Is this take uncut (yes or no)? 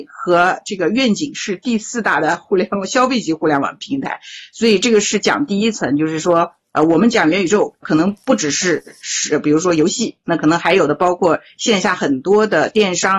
no